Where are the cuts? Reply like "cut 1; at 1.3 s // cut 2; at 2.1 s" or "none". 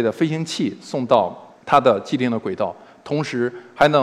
cut 1; at 1.6 s